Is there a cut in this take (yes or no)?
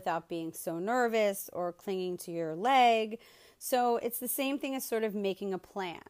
no